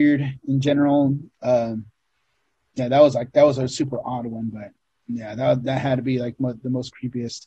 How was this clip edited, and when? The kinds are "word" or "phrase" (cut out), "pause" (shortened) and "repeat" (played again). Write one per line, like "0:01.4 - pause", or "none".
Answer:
none